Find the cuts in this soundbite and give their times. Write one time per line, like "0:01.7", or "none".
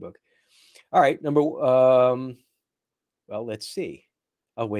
none